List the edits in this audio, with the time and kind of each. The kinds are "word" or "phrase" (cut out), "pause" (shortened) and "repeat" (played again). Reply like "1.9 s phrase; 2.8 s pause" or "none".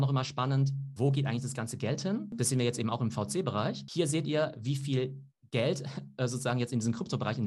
none